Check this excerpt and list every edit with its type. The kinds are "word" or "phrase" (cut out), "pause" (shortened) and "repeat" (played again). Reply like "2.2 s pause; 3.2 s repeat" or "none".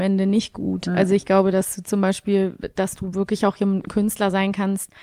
none